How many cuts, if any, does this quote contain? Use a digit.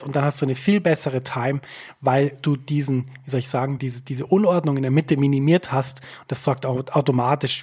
0